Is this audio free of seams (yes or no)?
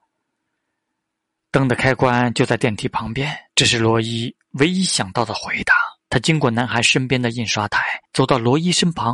no